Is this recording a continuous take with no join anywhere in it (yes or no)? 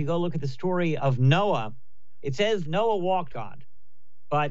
no